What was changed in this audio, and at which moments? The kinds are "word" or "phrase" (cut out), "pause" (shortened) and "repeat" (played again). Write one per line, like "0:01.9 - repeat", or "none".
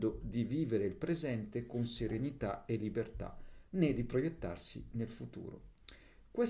none